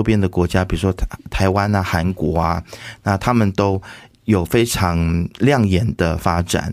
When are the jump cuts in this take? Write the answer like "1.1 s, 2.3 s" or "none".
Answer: none